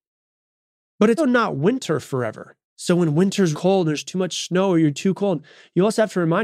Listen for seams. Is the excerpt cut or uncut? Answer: cut